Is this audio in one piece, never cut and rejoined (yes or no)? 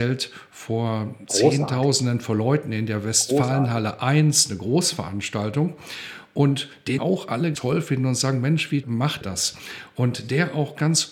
no